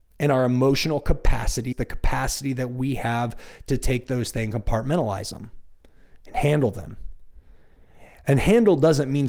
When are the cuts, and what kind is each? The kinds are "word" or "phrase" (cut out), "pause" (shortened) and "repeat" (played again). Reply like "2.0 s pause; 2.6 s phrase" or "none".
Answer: 1.7 s word; 4.5 s word